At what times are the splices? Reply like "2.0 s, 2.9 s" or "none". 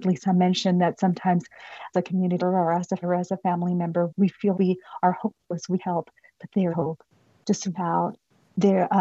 1.9 s, 2.4 s, 3.0 s, 4.1 s, 4.5 s, 5.8 s, 6.7 s, 7.7 s